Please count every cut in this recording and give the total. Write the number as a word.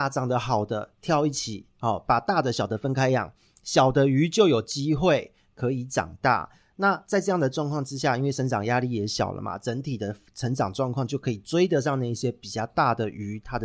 zero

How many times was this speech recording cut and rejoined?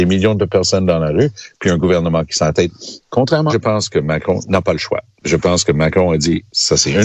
two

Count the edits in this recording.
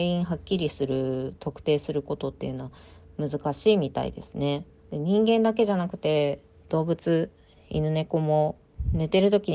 zero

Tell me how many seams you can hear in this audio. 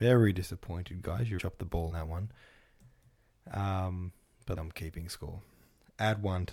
three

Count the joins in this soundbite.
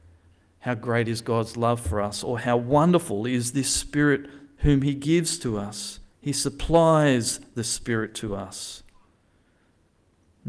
one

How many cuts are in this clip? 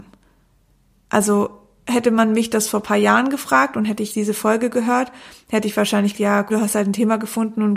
three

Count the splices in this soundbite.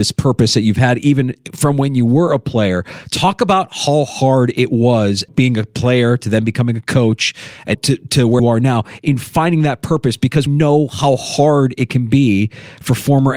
four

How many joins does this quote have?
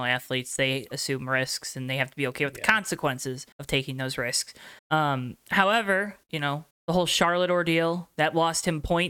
four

